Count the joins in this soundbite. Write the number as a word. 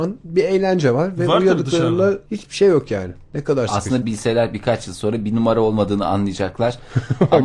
two